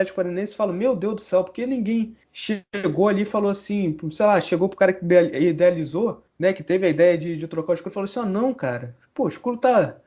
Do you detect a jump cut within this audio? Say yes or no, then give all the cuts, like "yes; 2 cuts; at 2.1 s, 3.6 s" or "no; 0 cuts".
yes; 2 cuts; at 2.2 s, 6.3 s